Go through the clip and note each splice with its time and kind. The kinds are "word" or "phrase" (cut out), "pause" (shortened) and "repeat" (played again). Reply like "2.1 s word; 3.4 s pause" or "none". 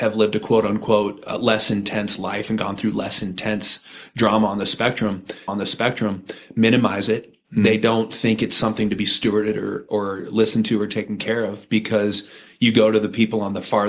5.5 s repeat